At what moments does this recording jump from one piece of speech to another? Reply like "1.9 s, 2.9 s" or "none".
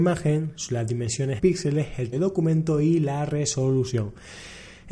1.4 s, 2.1 s